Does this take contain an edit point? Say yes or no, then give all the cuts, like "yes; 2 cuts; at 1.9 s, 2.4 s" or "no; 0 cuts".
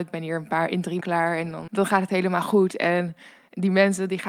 yes; 3 cuts; at 1.0 s, 1.7 s, 2.1 s